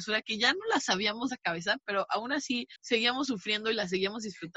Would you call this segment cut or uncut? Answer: cut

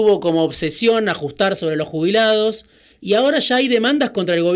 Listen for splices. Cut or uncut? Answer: cut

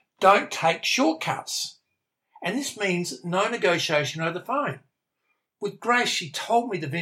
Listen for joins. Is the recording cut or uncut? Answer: uncut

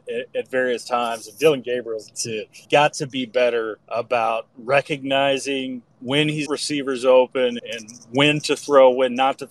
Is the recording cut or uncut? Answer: cut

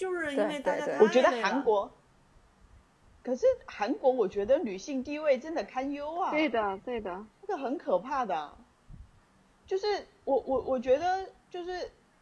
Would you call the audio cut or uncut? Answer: uncut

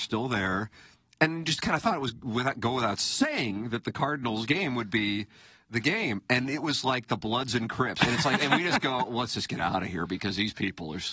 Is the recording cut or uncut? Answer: uncut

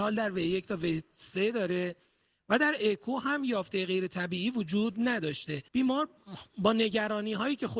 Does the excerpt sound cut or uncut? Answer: cut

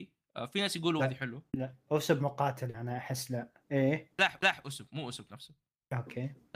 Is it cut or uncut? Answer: cut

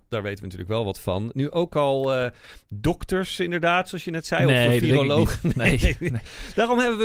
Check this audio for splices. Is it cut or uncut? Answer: uncut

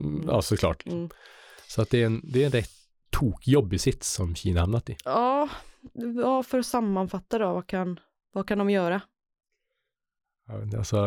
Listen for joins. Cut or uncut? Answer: uncut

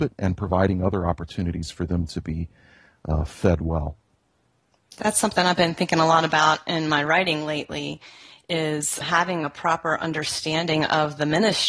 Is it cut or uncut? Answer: cut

